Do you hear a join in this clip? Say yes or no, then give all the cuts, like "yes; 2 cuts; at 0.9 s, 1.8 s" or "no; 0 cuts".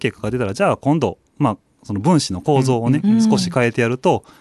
yes; 1 cut; at 1.3 s